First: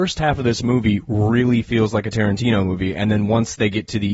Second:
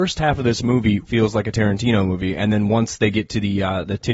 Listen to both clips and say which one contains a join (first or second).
second